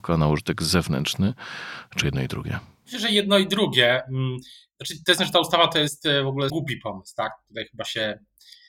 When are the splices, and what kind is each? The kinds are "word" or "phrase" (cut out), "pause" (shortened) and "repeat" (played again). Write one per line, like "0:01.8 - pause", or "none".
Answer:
0:02.0 - word
0:05.2 - word
0:06.5 - word